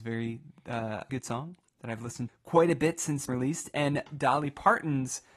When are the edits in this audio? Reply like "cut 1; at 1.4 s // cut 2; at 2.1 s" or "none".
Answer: cut 1; at 1.1 s // cut 2; at 2.3 s // cut 3; at 3.3 s